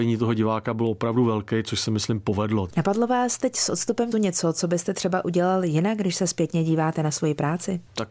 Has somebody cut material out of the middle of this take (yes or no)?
yes